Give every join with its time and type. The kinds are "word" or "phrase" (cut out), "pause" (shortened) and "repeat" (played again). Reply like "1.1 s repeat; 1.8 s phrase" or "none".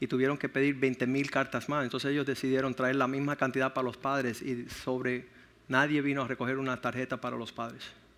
5.4 s pause